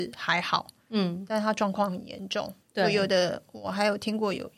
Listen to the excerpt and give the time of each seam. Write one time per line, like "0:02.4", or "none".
0:02.6